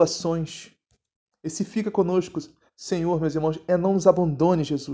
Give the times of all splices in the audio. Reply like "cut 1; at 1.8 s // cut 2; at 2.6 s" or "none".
none